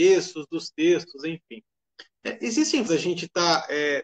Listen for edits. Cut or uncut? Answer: cut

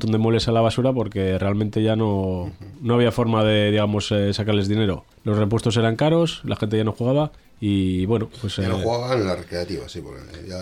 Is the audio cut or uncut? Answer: cut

